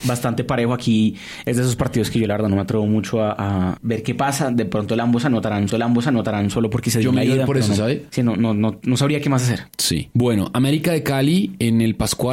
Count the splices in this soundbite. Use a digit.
1